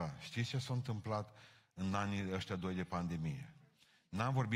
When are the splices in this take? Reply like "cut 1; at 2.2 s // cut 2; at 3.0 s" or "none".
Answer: none